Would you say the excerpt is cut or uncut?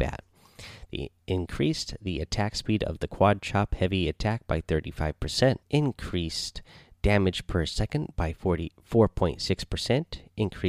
cut